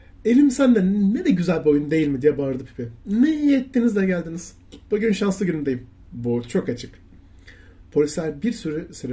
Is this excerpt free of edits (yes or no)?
no